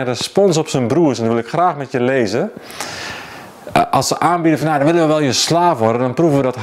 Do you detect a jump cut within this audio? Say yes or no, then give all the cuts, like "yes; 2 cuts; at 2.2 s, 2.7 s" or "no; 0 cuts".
no; 0 cuts